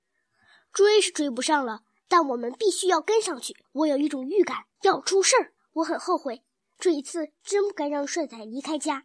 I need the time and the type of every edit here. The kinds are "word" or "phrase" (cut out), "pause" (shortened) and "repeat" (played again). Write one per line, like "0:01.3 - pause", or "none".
0:03.6 - pause
0:04.7 - pause
0:05.6 - pause